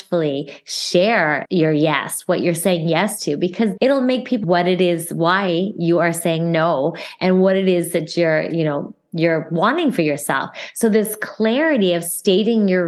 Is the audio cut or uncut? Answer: cut